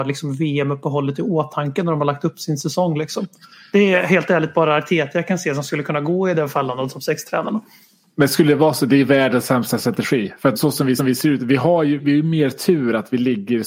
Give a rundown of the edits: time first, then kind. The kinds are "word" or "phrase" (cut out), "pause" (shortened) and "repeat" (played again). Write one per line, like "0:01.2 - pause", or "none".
0:10.6 - word
0:11.0 - repeat
0:12.0 - word